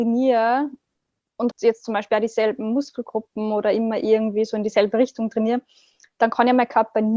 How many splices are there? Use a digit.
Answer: 1